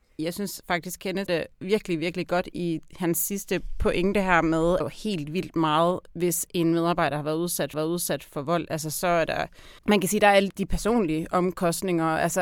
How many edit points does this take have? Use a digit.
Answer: 5